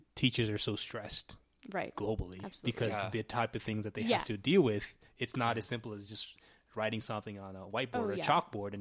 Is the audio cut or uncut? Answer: uncut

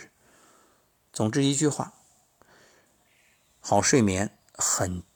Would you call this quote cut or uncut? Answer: uncut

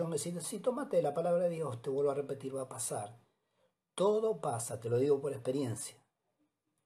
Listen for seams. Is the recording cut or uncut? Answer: uncut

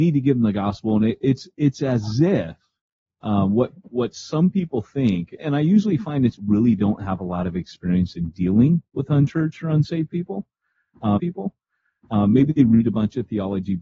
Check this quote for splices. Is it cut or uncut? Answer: cut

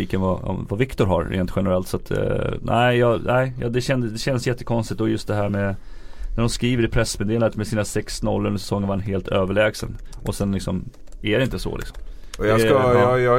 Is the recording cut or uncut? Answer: uncut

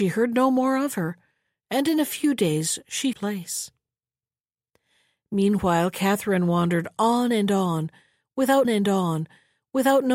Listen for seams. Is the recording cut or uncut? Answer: cut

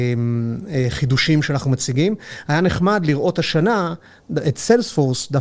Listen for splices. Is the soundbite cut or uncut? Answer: uncut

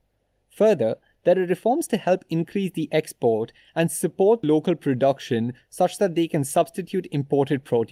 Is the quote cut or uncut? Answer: uncut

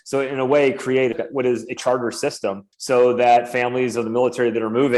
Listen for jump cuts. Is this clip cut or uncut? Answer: cut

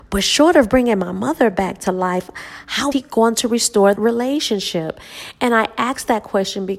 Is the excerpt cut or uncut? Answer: cut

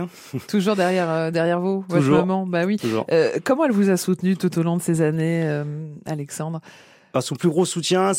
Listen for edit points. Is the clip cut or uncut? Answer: uncut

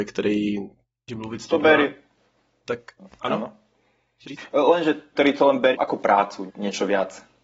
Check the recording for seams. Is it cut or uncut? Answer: cut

